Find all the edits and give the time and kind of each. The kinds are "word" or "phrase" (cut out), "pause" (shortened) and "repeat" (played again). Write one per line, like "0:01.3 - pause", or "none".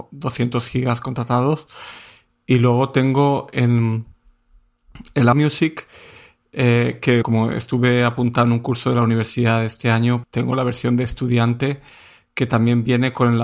0:05.3 - word
0:07.2 - word
0:10.2 - word